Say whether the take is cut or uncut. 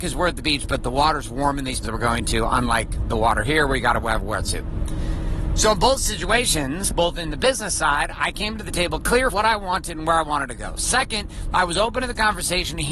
cut